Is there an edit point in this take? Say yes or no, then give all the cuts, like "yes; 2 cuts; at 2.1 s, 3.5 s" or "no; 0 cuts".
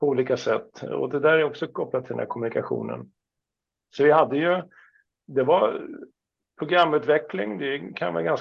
no; 0 cuts